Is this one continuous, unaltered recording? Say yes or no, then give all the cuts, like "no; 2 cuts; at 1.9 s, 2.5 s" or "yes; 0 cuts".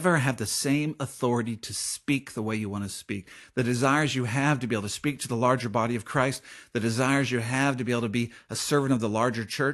yes; 0 cuts